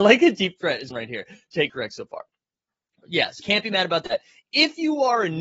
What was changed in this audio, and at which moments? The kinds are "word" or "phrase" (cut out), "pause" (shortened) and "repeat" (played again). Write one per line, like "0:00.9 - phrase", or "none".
0:00.9 - word
0:01.7 - word
0:03.4 - word